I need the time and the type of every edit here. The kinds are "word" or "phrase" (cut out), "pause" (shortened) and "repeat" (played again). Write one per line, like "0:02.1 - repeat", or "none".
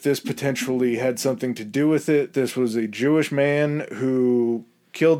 0:02.3 - word

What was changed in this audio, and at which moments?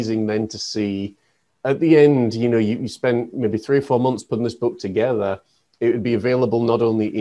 none

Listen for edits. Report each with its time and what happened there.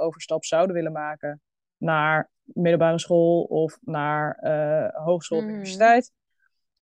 none

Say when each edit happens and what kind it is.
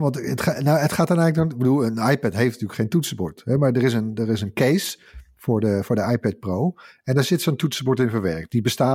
none

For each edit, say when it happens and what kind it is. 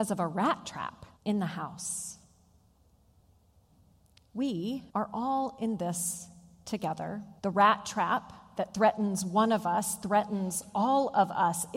0:01.2 - pause
0:04.9 - pause
0:07.4 - pause

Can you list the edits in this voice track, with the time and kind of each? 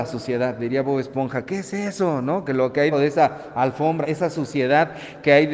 0:02.9 - word
0:04.0 - word

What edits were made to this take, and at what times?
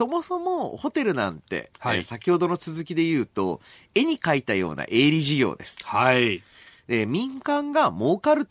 none

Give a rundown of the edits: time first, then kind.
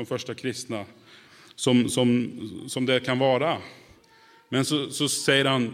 none

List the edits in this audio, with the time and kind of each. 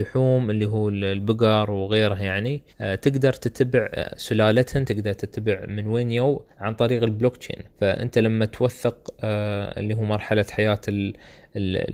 0:02.7 - pause
0:07.7 - pause

